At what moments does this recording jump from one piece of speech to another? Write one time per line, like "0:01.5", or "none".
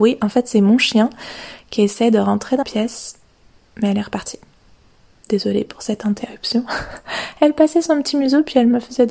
0:02.6